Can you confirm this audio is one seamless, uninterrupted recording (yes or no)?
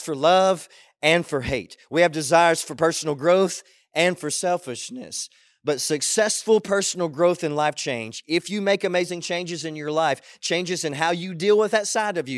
yes